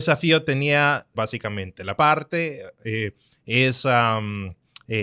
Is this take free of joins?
no; 2 cuts; at 1.1 s, 2.0 s

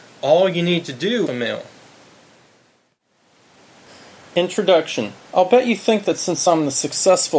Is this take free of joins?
no; 2 cuts; at 1.3 s, 5.2 s

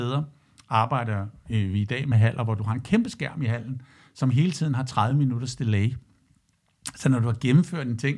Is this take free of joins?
yes; 0 cuts

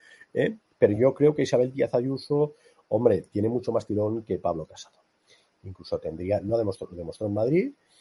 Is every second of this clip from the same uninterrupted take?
yes; 0 cuts

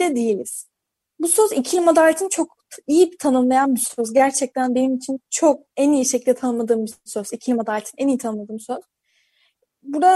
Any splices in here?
yes; 1 cut; at 0.9 s

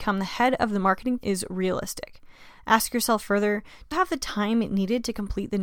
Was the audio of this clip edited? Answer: yes; 2 cuts; at 1.2 s, 3.9 s

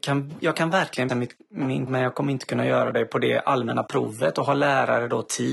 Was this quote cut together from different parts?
yes; 2 cuts; at 1.1 s, 1.9 s

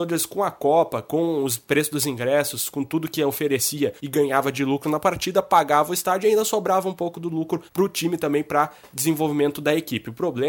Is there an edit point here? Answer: yes; 2 cuts; at 4.0 s, 7.7 s

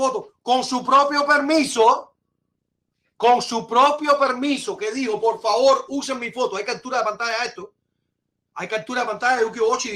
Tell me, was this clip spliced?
no; 0 cuts

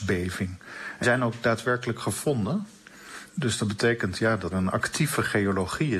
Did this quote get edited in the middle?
yes; 3 cuts; at 1.0 s, 3.3 s, 4.5 s

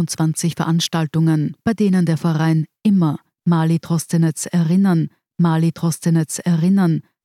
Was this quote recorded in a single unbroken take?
no; 1 cut; at 5.3 s

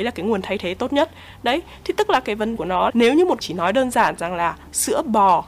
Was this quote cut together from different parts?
yes; 3 cuts; at 2.6 s, 2.9 s, 3.4 s

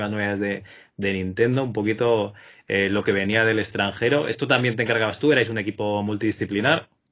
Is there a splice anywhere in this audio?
no; 0 cuts

